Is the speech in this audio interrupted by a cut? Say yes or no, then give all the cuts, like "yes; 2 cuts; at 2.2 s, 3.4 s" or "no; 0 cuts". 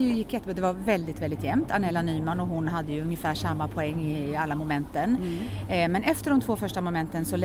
no; 0 cuts